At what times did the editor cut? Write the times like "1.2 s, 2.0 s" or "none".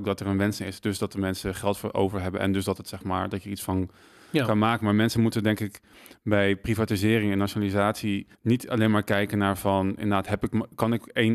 8.3 s